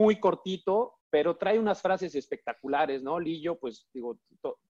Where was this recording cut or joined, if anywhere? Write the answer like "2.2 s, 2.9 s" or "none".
1.0 s